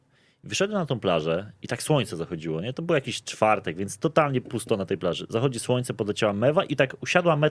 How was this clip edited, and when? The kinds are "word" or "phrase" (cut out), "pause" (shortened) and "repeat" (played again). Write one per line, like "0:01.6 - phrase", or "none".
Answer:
none